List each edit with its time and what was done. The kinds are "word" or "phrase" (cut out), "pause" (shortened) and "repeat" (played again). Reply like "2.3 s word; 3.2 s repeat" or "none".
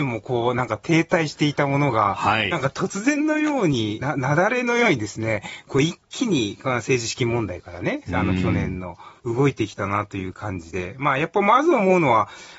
4.0 s word